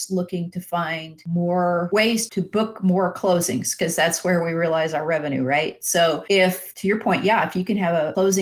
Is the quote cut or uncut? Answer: cut